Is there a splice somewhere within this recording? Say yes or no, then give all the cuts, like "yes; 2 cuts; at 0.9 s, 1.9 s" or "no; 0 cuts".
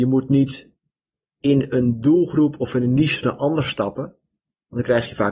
no; 0 cuts